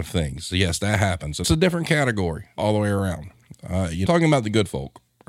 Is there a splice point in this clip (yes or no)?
yes